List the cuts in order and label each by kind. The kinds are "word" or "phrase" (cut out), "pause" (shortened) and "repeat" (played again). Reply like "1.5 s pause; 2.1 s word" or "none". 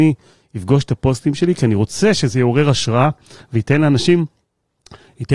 none